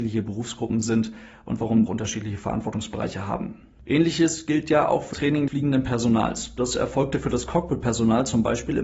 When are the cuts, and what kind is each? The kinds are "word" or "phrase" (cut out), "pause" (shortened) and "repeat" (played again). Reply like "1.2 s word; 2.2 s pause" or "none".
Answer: 1.9 s phrase; 5.1 s word; 5.5 s word